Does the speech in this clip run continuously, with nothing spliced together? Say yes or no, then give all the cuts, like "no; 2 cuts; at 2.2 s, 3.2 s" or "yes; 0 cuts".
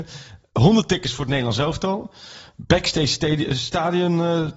yes; 0 cuts